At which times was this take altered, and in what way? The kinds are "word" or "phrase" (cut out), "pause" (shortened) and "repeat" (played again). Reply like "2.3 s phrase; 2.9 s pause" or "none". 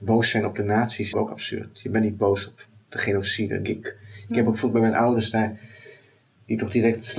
1.1 s word; 3.6 s word